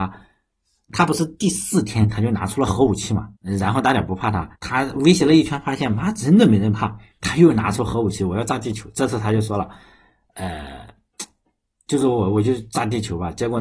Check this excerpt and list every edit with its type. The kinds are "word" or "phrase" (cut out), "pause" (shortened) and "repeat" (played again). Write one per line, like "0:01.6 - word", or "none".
0:03.4 - pause
0:04.5 - pause

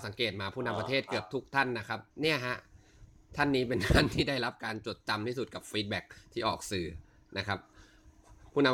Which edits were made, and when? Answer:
0:02.1 - pause

